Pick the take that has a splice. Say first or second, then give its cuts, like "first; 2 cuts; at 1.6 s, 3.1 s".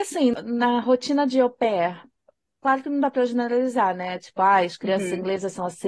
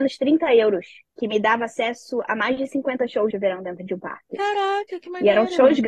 second; 2 cuts; at 1.0 s, 3.3 s